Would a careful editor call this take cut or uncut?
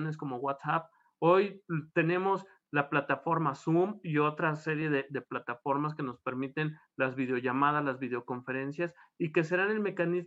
uncut